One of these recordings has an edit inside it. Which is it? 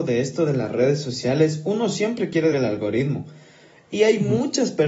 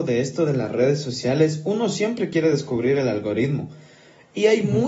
first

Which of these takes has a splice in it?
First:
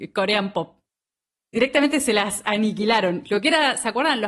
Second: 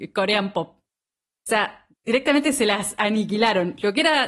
first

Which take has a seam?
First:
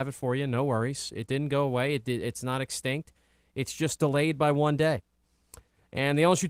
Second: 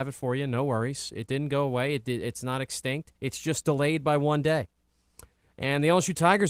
second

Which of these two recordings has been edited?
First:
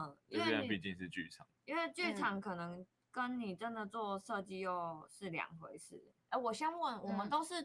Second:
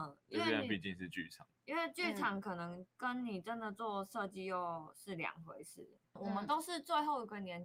second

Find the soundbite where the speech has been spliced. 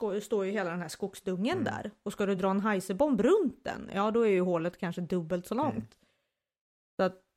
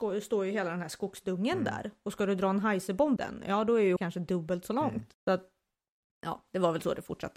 second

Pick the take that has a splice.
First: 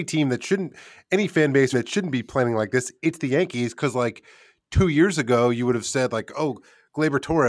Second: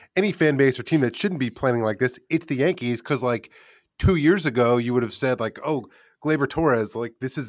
first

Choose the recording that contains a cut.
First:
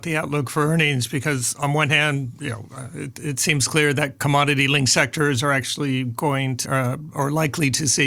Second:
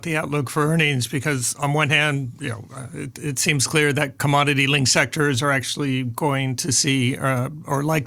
first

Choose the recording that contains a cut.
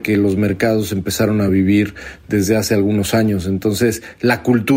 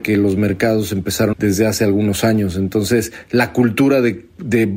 second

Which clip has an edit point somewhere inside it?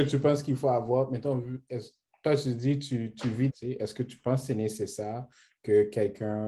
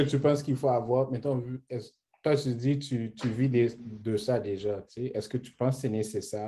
first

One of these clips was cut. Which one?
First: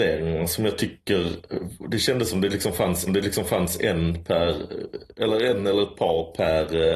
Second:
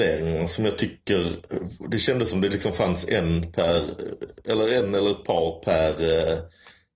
first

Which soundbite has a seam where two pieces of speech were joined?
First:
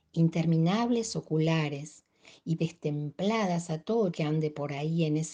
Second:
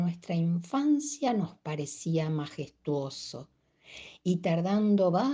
first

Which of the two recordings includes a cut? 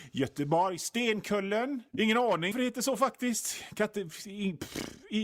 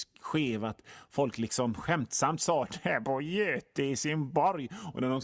first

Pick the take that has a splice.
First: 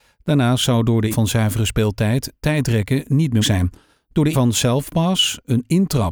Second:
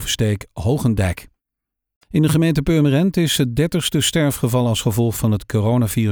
first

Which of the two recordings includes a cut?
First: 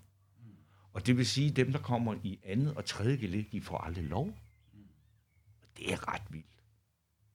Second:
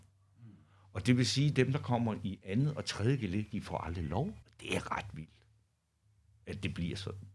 second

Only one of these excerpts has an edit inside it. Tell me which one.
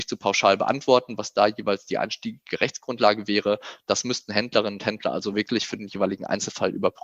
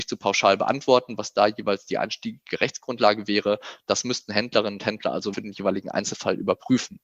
second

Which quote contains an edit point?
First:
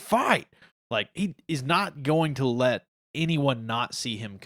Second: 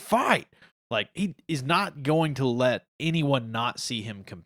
second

